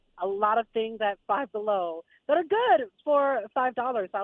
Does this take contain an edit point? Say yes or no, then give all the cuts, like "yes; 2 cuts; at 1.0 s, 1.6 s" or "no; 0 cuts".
no; 0 cuts